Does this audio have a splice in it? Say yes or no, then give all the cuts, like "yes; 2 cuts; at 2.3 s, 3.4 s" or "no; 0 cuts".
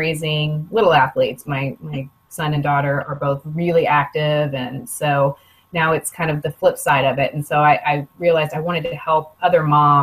no; 0 cuts